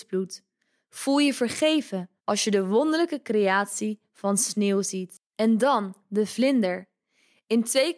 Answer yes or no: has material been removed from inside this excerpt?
yes